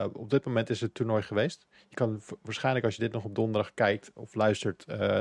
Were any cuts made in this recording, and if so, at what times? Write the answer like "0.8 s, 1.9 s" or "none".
none